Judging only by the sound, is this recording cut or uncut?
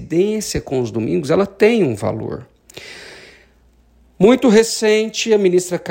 uncut